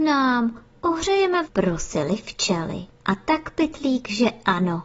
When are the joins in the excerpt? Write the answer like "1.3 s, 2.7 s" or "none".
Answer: 1.4 s, 2.9 s